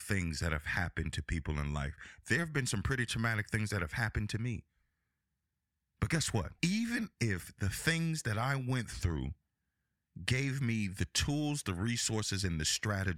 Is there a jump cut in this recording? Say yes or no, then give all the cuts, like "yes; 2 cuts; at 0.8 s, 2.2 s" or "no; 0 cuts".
yes; 1 cut; at 6.6 s